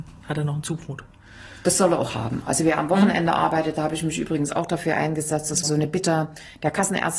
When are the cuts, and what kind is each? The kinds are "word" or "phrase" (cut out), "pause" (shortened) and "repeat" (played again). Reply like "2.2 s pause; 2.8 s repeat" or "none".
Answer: 5.6 s word